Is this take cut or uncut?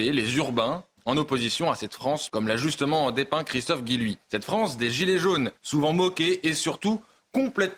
cut